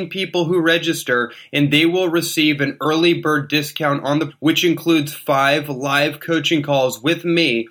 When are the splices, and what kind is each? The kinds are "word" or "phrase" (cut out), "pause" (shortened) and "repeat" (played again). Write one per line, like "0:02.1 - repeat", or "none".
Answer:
0:04.3 - word